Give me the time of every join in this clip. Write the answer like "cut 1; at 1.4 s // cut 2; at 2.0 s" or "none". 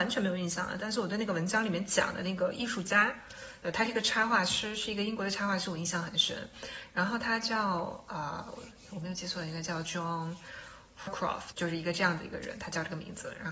cut 1; at 11.1 s // cut 2; at 11.5 s